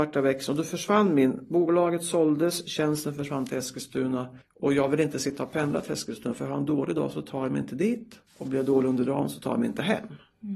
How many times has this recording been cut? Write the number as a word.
two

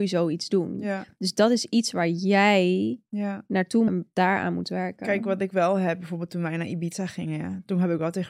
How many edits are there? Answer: one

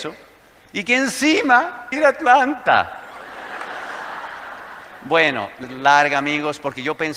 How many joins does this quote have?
two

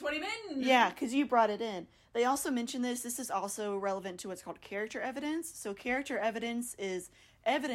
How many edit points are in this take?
zero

